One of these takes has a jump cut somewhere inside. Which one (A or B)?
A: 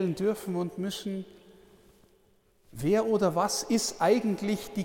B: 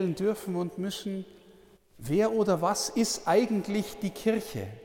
B